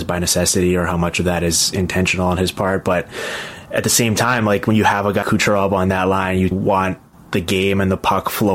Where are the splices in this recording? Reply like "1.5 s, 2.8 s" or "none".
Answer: 5.2 s, 6.5 s